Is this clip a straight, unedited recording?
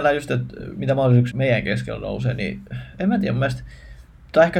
no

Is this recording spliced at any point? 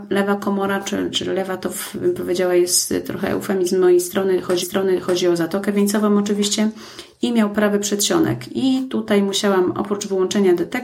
yes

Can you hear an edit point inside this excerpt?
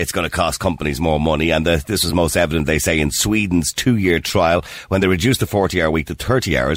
no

